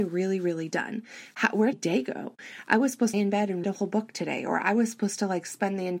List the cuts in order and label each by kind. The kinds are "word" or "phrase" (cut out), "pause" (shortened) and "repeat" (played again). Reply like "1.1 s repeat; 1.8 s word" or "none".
1.7 s phrase; 3.1 s phrase; 3.6 s word